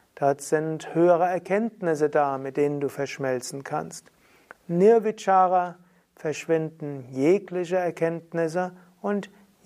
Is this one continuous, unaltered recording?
yes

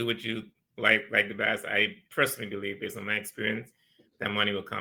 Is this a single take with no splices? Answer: yes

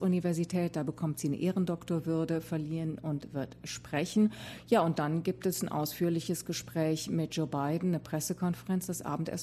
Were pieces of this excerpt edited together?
no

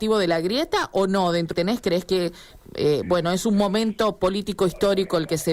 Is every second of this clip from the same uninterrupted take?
no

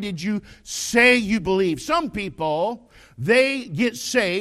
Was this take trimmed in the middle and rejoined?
no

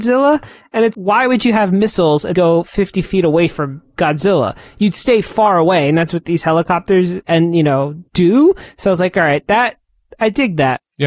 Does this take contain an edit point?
yes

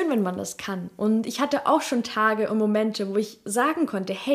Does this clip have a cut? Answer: no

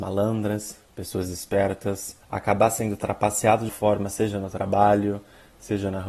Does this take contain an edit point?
yes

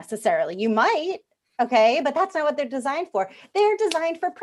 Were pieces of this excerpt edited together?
no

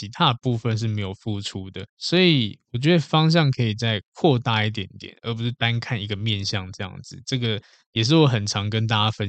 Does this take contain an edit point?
yes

